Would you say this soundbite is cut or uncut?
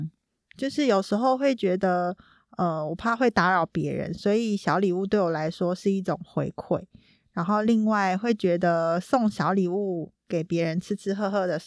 uncut